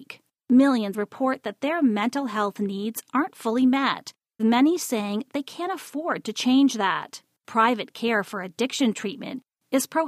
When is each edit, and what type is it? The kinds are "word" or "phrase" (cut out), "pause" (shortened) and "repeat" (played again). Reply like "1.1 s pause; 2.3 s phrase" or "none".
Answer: 0.9 s phrase; 4.4 s word